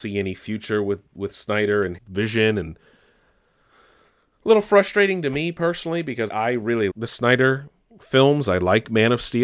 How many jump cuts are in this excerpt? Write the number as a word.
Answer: three